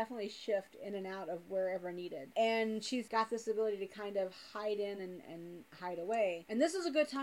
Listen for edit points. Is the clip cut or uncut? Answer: uncut